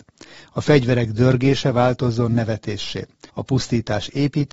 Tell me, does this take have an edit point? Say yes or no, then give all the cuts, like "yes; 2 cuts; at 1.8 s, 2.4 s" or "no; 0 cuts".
yes; 1 cut; at 3.3 s